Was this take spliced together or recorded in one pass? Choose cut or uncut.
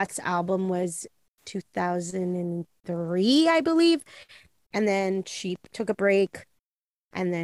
uncut